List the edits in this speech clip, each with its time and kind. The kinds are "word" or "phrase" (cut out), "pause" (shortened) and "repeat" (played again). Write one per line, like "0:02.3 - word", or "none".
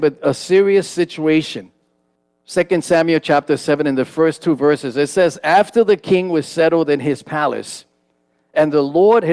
0:02.2 - pause